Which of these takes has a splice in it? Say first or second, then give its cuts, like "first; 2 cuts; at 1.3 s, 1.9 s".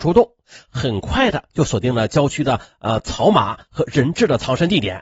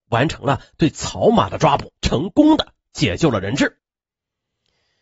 second; 1 cut; at 2.0 s